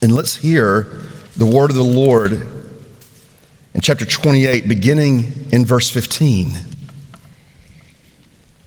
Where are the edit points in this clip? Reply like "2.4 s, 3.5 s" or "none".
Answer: 1.3 s